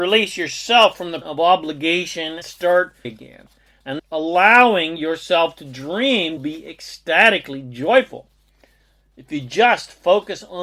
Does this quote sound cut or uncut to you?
cut